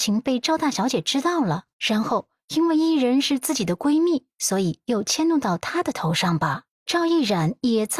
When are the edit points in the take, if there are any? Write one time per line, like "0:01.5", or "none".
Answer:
0:01.7
0:06.7